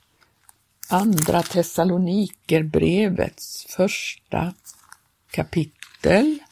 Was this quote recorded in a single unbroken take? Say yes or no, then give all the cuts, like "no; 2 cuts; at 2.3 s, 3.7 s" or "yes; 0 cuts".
no; 1 cut; at 5.3 s